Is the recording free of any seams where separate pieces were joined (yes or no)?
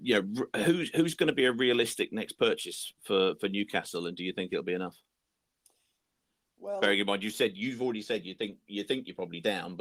yes